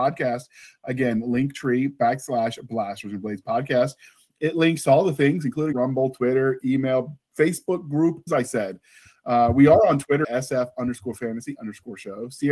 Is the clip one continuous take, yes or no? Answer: no